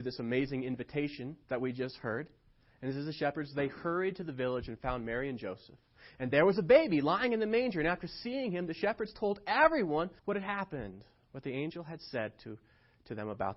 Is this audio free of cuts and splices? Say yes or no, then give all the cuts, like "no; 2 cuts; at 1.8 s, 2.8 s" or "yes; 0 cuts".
no; 2 cuts; at 1.4 s, 10.2 s